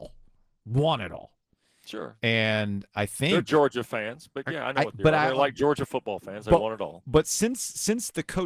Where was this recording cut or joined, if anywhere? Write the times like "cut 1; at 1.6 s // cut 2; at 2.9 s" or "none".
none